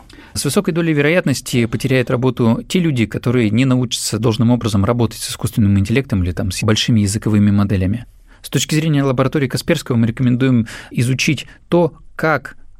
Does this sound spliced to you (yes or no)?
no